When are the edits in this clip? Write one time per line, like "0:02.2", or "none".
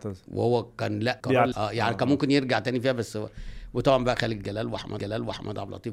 0:01.2
0:01.5
0:05.0